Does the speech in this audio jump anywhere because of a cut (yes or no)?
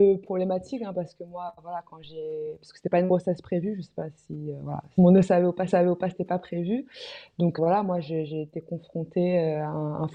yes